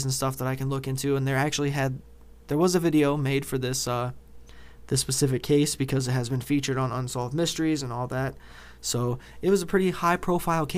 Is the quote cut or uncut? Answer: uncut